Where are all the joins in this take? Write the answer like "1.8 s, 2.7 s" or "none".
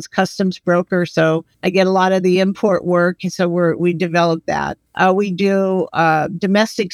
1.5 s, 4.9 s

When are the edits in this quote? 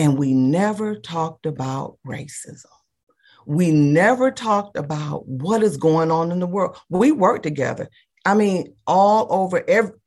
none

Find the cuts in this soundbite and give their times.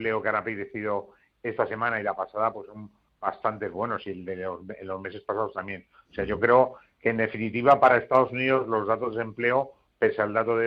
none

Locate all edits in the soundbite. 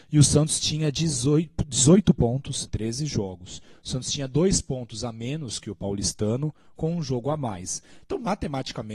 2.7 s

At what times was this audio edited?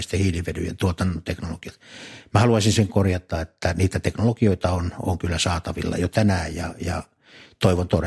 none

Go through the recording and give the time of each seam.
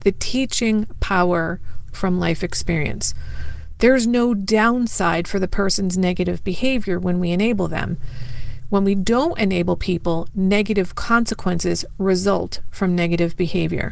1.9 s

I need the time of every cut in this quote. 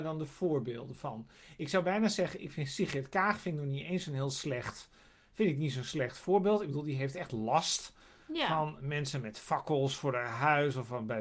none

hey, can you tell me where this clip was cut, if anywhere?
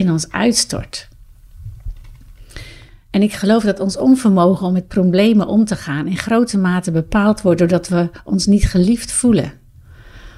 none

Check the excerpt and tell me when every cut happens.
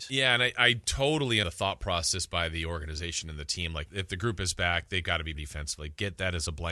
1.4 s, 3.9 s, 5.3 s

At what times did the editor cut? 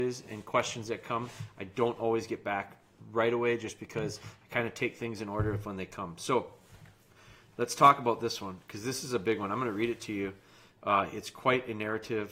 none

